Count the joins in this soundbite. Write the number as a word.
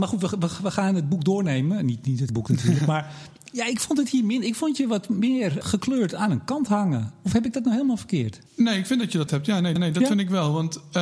five